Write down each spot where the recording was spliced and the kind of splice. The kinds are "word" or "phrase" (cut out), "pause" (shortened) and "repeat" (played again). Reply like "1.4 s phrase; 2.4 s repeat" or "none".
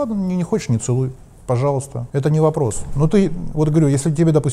2.1 s pause